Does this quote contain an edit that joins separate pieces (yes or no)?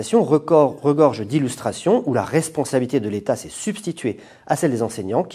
no